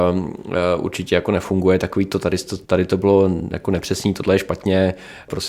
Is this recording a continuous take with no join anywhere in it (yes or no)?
no